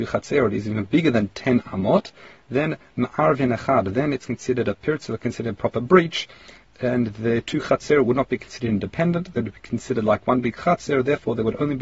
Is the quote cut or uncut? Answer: uncut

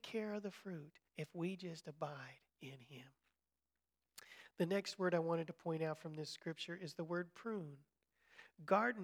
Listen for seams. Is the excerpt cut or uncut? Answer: cut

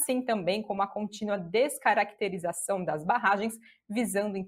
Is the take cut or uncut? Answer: uncut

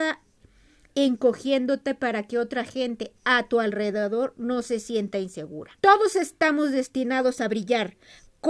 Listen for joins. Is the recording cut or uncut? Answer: cut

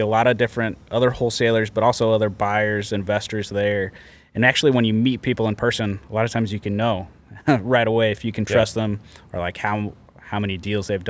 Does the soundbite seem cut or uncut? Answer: uncut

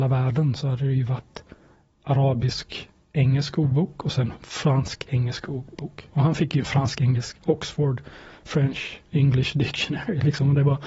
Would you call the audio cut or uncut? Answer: uncut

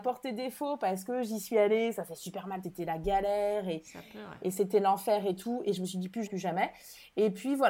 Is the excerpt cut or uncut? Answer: cut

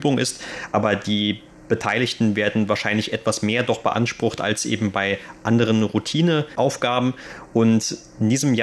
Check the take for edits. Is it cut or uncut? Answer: uncut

